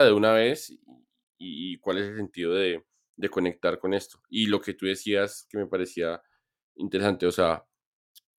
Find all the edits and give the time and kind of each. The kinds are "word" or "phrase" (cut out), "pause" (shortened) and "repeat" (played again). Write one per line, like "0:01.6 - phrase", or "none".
none